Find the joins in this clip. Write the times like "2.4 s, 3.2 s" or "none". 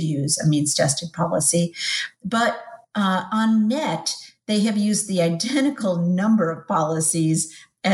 none